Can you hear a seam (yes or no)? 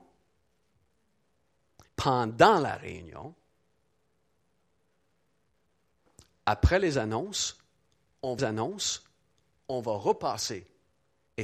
yes